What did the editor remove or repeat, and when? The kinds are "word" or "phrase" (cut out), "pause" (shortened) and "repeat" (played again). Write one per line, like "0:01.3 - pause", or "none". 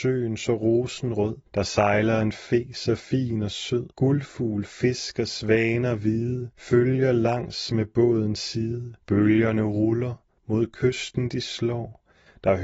0:01.5 - pause
0:03.9 - pause
0:06.5 - pause
0:09.0 - pause